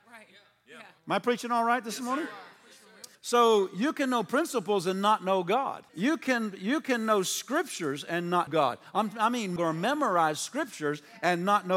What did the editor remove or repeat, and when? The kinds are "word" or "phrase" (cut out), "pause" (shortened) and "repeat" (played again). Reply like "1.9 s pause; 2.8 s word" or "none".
1.0 s pause; 3.1 s pause; 5.9 s pause; 8.5 s word; 9.6 s phrase